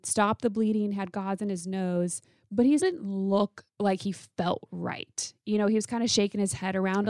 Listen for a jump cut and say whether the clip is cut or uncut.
cut